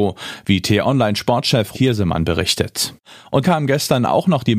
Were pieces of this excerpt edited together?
yes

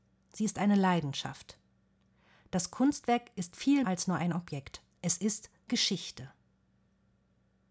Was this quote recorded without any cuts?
no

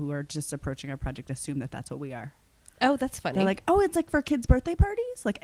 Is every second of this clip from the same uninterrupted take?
yes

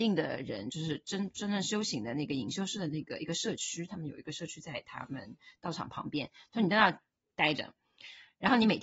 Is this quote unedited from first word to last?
yes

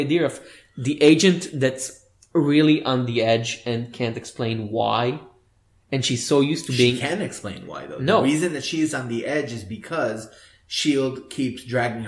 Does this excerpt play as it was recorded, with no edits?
yes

